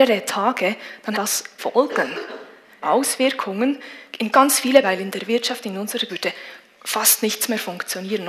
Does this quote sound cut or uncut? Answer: cut